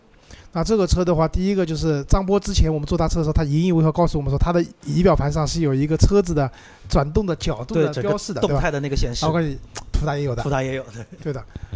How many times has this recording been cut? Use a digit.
0